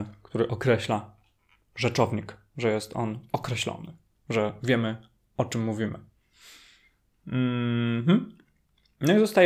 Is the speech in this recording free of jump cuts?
yes; 0 cuts

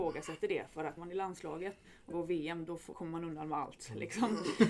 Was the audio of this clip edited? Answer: yes; 3 cuts; at 1.0 s, 2.1 s, 2.9 s

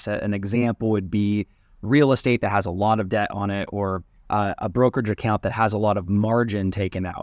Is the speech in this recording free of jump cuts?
yes; 0 cuts

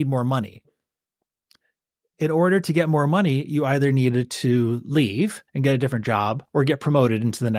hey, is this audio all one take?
no; 2 cuts; at 5.5 s, 6.5 s

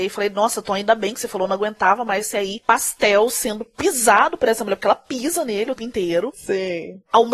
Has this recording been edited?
yes; 1 cut; at 5.8 s

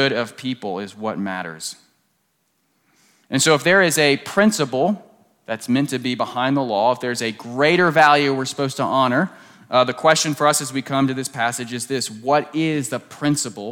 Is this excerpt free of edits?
yes; 0 cuts

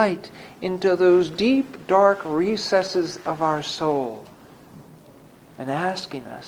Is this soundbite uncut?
yes; 0 cuts

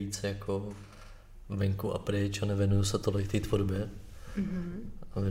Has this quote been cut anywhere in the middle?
no; 0 cuts

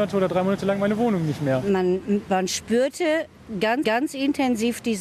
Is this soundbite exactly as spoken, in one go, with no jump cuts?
no; 1 cut; at 3.8 s

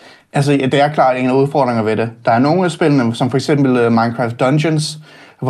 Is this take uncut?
yes; 0 cuts

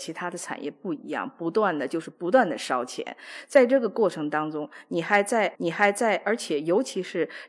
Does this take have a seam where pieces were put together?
yes; 1 cut; at 5.5 s

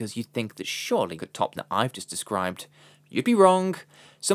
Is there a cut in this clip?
yes; 2 cuts; at 1.2 s, 1.5 s

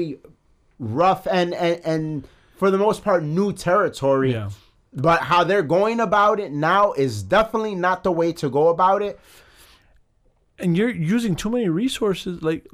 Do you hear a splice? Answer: no; 0 cuts

